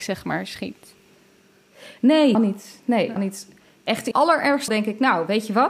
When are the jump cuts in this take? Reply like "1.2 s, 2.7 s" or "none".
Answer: 2.3 s, 3.2 s, 4.1 s, 4.7 s